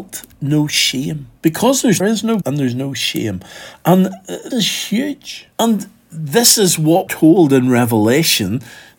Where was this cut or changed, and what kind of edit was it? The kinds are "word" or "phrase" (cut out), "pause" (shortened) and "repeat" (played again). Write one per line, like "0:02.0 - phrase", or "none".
0:01.4 - pause
0:02.0 - phrase
0:02.4 - word
0:04.5 - word
0:05.5 - pause
0:07.1 - word